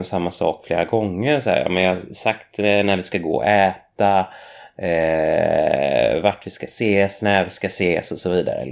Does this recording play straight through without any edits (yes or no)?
yes